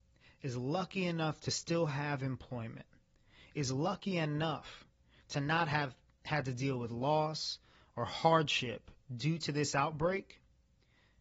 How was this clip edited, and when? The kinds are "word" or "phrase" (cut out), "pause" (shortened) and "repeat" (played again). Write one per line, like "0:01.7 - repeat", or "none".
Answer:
none

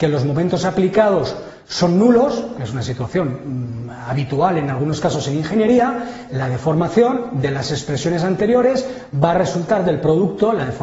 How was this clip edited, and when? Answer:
0:06.3 - word

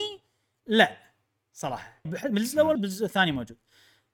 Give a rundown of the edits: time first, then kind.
0:02.1 - word
0:02.8 - word

